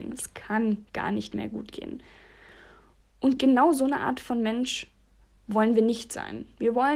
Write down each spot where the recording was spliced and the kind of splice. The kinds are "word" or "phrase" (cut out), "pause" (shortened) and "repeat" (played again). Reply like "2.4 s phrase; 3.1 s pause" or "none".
none